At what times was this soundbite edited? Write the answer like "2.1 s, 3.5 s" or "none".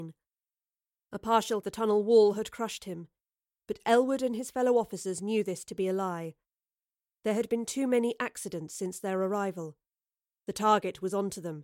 1.6 s